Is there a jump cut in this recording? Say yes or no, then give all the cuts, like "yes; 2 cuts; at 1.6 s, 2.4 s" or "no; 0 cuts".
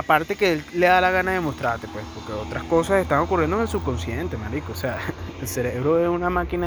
no; 0 cuts